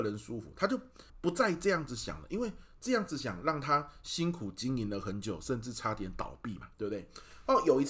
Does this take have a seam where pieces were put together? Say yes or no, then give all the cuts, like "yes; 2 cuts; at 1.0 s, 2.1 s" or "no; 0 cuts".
yes; 2 cuts; at 1.1 s, 6.7 s